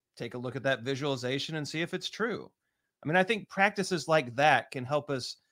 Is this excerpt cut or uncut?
uncut